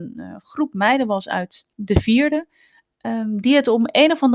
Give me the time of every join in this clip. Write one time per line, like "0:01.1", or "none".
0:01.7